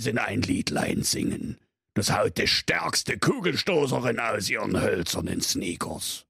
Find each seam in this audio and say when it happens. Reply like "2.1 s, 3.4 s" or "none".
none